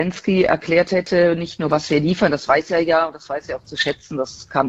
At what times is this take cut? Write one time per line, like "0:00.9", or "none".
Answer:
none